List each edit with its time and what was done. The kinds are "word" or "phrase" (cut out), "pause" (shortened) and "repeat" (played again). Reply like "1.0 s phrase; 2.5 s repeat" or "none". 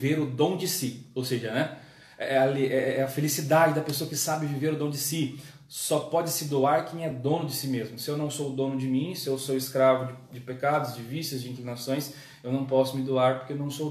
none